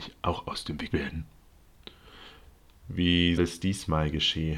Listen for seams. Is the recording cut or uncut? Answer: cut